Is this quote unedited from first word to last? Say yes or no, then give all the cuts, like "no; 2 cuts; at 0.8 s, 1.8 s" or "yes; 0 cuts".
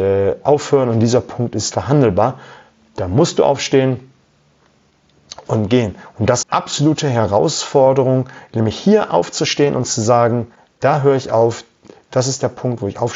no; 2 cuts; at 1.7 s, 6.4 s